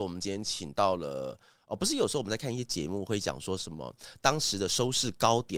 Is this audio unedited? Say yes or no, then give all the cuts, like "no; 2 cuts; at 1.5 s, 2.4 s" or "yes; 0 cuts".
yes; 0 cuts